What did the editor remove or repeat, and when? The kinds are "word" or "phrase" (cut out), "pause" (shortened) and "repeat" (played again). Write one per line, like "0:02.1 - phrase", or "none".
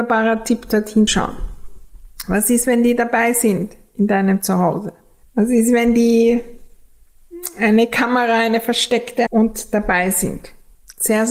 0:01.1 - word
0:05.2 - pause
0:09.3 - word